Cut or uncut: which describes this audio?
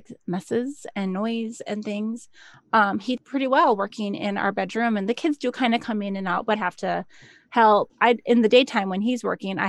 cut